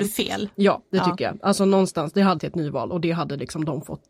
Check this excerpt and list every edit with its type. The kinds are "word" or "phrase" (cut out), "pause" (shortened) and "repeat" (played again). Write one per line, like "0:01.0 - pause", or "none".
0:02.4 - word